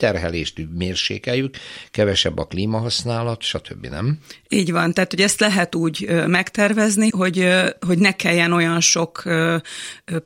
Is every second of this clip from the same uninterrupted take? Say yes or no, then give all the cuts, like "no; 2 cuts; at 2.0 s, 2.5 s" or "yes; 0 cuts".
no; 1 cut; at 7.1 s